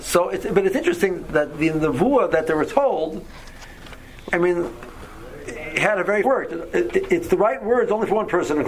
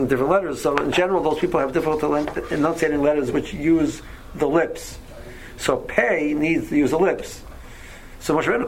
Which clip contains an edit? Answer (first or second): first